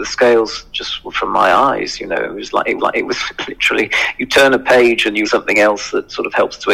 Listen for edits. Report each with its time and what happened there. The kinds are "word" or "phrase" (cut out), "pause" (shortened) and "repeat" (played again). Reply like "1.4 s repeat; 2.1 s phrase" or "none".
1.1 s word; 2.8 s repeat; 5.2 s word